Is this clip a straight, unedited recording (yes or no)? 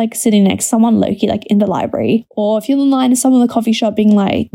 yes